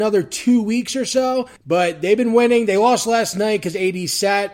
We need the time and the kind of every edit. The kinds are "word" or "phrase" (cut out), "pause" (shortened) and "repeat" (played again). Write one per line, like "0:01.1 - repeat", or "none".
0:01.6 - pause